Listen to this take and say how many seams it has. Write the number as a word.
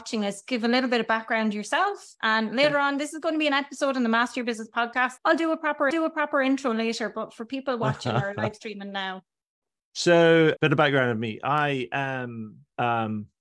three